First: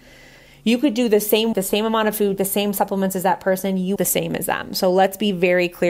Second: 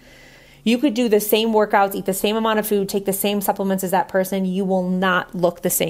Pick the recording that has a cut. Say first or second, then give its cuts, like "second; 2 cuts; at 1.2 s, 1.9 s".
first; 3 cuts; at 1.5 s, 2.4 s, 4.0 s